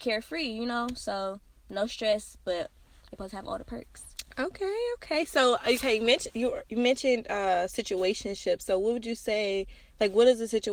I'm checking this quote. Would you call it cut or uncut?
uncut